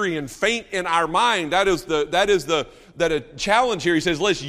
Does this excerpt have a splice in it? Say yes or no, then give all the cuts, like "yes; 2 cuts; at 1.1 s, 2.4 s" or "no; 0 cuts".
no; 0 cuts